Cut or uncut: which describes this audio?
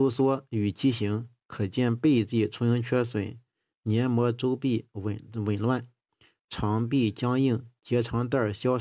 uncut